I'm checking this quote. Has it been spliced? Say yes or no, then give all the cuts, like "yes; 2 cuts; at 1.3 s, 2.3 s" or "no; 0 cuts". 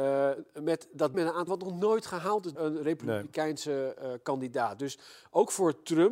yes; 3 cuts; at 1.1 s, 1.5 s, 2.5 s